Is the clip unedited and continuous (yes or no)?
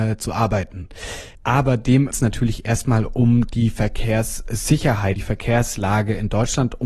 no